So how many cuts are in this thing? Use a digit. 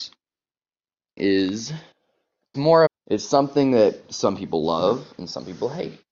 3